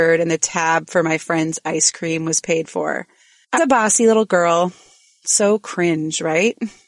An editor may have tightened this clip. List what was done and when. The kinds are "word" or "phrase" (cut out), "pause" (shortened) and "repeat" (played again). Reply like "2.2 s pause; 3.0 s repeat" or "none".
3.6 s word